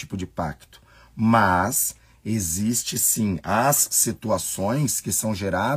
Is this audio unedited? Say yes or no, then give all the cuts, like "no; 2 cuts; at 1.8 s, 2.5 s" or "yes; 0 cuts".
yes; 0 cuts